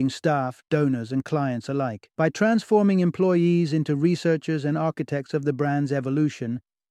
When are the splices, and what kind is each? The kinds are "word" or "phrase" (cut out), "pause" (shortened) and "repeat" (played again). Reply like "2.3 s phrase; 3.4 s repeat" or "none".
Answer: 2.1 s pause